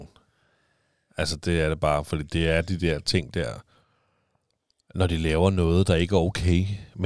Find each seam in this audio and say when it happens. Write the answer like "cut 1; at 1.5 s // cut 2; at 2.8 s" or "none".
none